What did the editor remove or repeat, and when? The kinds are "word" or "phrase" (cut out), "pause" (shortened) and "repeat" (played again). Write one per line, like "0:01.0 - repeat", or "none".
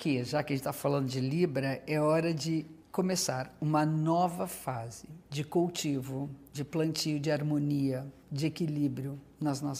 0:02.8 - pause
0:05.2 - pause